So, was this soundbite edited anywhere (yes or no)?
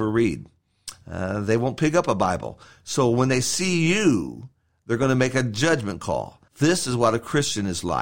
yes